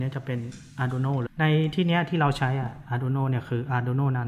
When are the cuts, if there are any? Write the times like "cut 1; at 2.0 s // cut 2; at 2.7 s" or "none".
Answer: cut 1; at 1.3 s